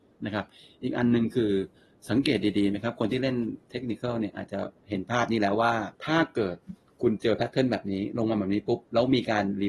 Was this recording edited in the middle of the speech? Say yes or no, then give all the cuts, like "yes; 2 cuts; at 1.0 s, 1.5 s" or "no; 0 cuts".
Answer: yes; 1 cut; at 5.9 s